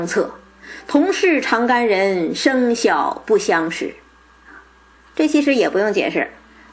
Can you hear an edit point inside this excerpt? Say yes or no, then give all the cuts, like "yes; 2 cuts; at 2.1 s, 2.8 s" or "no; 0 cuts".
yes; 1 cut; at 4.9 s